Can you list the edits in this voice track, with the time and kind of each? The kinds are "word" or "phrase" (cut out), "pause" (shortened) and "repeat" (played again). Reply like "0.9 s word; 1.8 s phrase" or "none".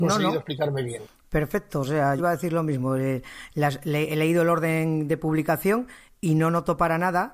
2.2 s word